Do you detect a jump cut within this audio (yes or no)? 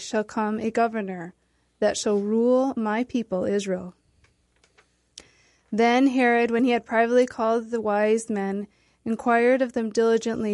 no